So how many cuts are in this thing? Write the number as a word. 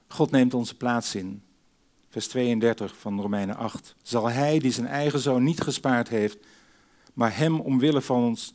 one